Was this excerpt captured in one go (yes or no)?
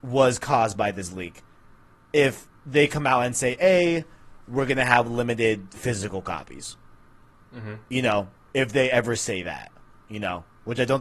yes